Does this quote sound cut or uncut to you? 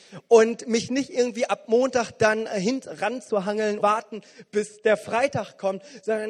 cut